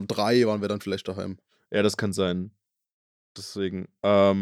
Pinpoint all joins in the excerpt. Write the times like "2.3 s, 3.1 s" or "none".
none